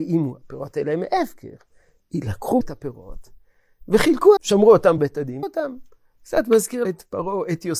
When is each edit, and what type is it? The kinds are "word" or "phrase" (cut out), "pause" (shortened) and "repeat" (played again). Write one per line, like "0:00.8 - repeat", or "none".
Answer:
0:02.6 - word
0:04.4 - word
0:05.0 - word
0:05.4 - word
0:06.8 - word